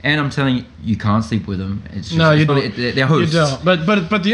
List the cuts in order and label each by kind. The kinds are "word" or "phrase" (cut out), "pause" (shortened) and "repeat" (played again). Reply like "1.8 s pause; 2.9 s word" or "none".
2.5 s word